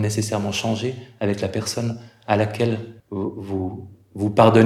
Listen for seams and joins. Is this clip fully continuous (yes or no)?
no